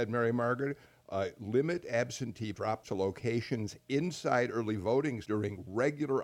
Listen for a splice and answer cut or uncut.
cut